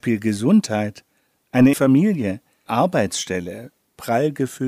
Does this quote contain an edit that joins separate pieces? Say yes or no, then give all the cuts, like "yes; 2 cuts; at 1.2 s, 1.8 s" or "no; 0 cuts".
yes; 2 cuts; at 1.7 s, 2.7 s